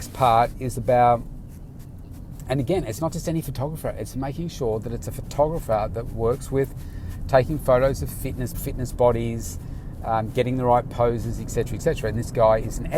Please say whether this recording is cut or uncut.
cut